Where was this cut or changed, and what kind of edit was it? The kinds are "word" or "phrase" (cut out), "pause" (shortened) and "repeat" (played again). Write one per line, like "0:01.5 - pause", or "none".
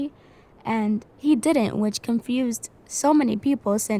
0:01.1 - pause